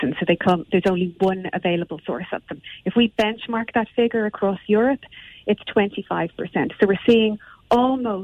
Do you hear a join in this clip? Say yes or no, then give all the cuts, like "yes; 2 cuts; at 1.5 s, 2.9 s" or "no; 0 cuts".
no; 0 cuts